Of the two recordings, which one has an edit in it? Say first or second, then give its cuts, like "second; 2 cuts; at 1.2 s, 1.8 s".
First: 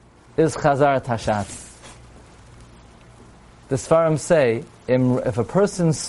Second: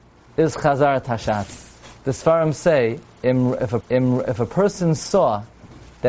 second; 2 cuts; at 2.0 s, 3.8 s